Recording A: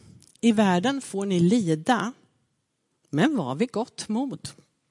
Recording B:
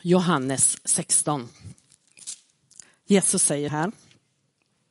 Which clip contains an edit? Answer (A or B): B